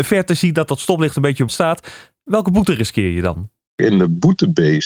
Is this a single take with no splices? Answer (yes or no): no